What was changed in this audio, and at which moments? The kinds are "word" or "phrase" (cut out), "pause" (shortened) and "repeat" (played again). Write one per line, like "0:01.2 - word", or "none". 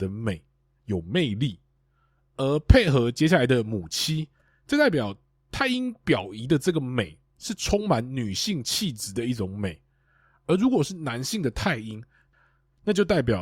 none